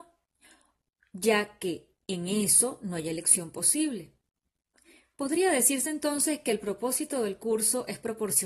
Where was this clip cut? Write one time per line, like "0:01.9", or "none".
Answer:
none